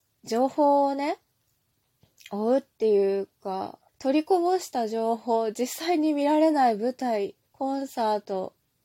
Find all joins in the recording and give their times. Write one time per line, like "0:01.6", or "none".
0:03.9
0:07.5